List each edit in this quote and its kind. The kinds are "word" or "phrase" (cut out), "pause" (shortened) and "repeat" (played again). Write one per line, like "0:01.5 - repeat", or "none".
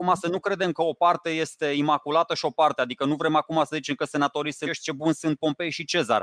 0:04.6 - phrase